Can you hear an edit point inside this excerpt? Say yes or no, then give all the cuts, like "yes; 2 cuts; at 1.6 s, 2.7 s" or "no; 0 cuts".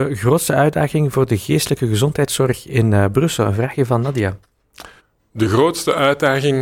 yes; 1 cut; at 5.0 s